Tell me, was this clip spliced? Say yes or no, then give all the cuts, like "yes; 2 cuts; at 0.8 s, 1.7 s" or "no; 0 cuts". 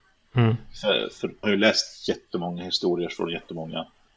yes; 1 cut; at 1.4 s